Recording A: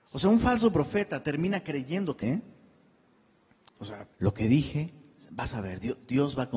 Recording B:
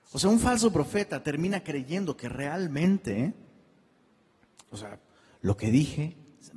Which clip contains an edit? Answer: A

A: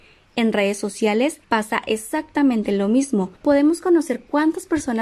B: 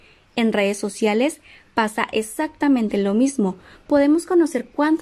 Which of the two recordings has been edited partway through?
A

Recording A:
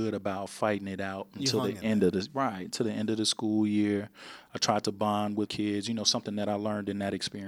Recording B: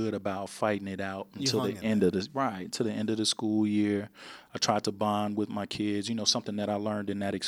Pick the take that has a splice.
A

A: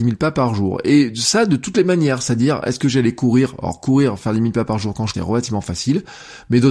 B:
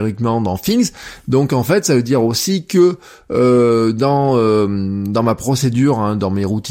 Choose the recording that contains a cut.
A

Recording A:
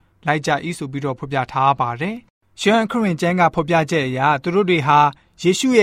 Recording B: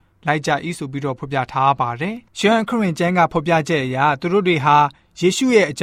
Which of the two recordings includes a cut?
B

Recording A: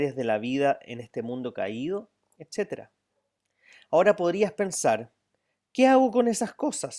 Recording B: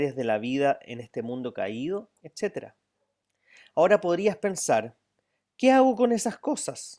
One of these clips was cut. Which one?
B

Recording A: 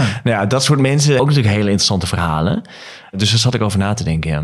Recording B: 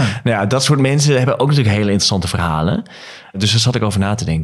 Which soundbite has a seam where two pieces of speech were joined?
A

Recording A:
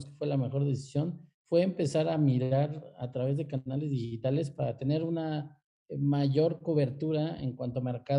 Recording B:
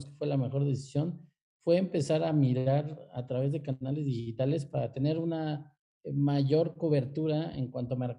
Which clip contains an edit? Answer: A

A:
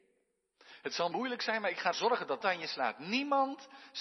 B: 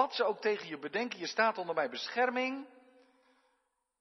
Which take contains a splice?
A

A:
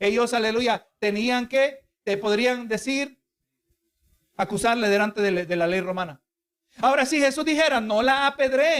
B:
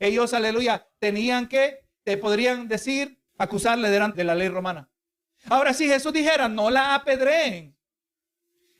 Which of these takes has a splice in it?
B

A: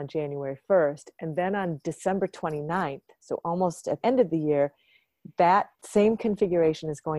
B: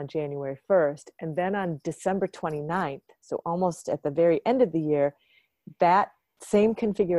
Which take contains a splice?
A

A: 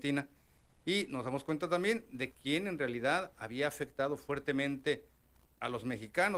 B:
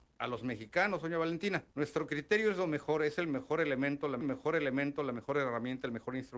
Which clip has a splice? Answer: B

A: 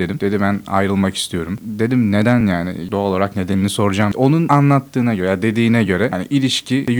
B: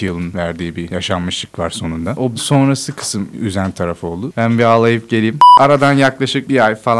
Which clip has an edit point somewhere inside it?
B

